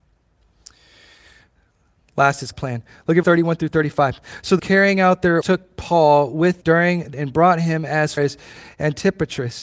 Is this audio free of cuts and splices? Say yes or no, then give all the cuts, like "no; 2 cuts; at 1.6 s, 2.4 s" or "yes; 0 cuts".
no; 7 cuts; at 2.5 s, 3.2 s, 4.6 s, 5.4 s, 6.6 s, 7.1 s, 8.2 s